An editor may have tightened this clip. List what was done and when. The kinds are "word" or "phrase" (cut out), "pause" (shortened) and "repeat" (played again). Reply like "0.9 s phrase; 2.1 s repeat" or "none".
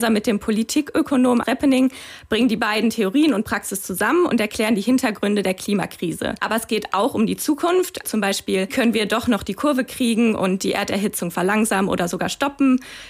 8.0 s word; 8.7 s word